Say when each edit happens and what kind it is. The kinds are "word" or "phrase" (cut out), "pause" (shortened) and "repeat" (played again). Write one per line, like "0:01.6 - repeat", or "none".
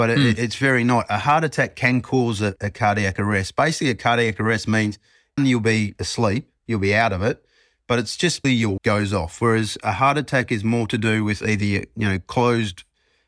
0:02.6 - word
0:05.4 - word
0:08.4 - word
0:08.8 - word